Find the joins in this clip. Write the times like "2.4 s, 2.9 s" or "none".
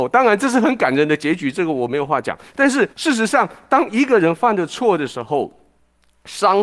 2.9 s

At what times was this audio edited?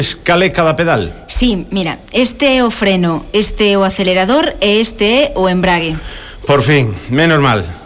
none

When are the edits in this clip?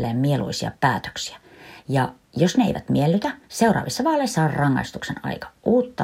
3.4 s

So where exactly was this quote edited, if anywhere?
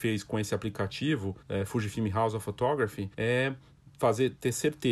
1.4 s, 3.1 s

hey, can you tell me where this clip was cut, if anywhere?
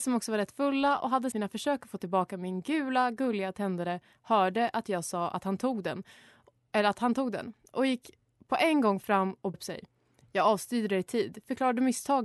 1.3 s, 9.5 s

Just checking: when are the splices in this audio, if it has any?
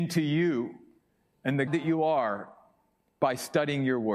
1.7 s

